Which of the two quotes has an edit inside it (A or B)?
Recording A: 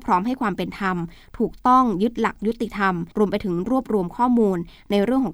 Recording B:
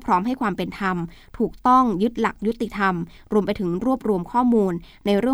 A